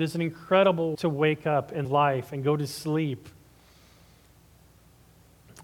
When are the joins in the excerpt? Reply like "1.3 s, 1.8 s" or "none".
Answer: 0.9 s, 1.8 s